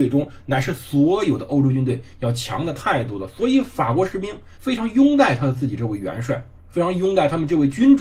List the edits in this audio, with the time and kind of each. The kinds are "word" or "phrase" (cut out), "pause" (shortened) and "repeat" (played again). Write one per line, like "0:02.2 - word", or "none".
0:04.5 - pause
0:06.6 - pause